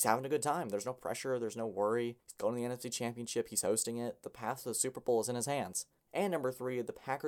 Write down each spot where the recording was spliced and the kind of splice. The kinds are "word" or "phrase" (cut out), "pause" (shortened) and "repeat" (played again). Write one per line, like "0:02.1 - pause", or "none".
0:02.2 - pause
0:06.0 - pause